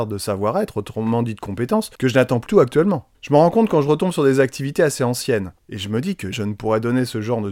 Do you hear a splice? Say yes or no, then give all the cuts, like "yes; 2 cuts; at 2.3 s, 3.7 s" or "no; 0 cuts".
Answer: yes; 5 cuts; at 2.0 s, 2.5 s, 3.1 s, 5.6 s, 6.3 s